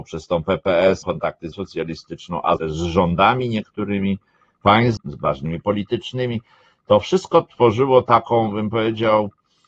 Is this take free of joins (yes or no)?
no